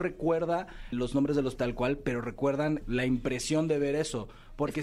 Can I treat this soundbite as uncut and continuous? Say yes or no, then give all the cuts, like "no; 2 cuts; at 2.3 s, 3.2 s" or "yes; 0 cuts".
no; 3 cuts; at 0.9 s, 1.6 s, 2.8 s